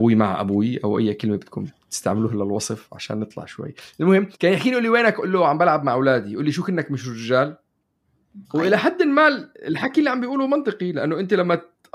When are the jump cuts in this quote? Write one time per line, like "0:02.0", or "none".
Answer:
0:04.3
0:08.4